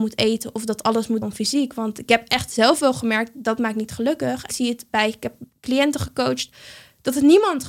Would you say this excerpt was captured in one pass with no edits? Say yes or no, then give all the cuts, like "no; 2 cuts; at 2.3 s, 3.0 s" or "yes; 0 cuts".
no; 2 cuts; at 1.2 s, 4.5 s